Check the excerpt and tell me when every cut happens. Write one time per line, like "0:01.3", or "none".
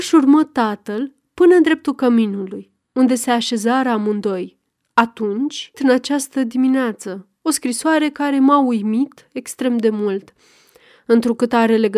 0:05.7